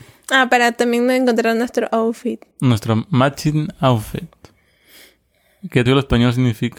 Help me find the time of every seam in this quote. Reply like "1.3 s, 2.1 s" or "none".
2.5 s, 5.9 s